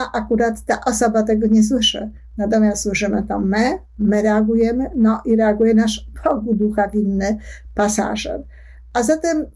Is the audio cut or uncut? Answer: uncut